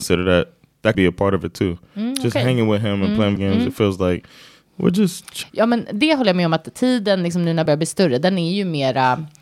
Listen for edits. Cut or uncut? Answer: cut